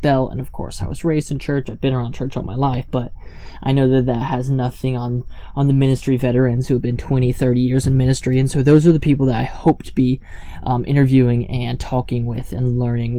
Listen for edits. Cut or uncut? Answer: uncut